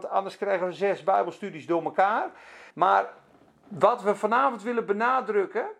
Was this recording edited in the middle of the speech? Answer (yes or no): yes